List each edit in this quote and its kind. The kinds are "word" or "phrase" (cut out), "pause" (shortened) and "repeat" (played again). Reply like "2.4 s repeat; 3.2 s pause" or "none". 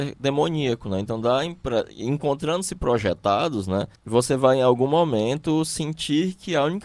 4.0 s pause

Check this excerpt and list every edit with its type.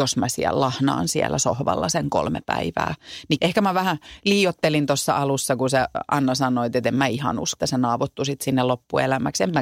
3.4 s word; 7.6 s word

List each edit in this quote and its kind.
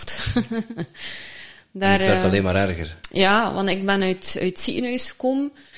none

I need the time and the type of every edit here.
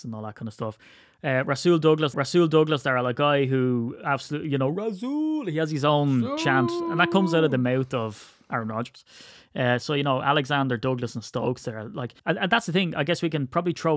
2.1 s repeat; 12.2 s pause

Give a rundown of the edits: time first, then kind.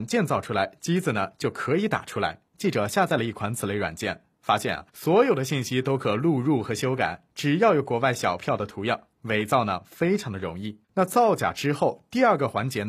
2.5 s pause; 4.9 s pause; 7.3 s pause; 10.8 s pause

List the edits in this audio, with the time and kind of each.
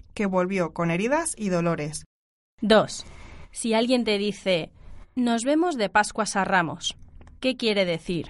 none

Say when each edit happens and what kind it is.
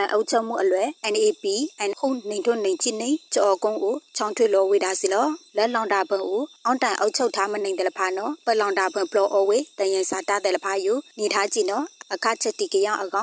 1.9 s word

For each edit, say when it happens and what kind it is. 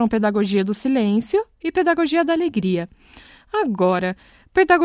none

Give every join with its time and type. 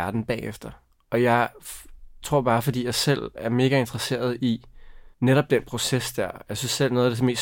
5.1 s pause

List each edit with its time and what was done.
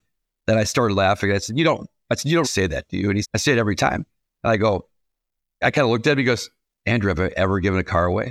2.4 s word; 3.2 s word; 5.6 s word

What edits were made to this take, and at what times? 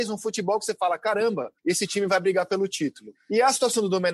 1.6 s pause

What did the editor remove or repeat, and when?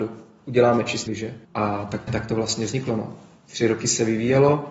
1.1 s word; 1.4 s pause; 2.1 s word

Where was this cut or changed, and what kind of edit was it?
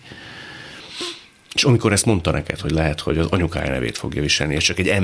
none

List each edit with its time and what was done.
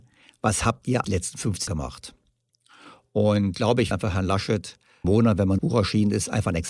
1.0 s word; 1.7 s word; 3.5 s word; 3.9 s word; 5.0 s word; 5.6 s word

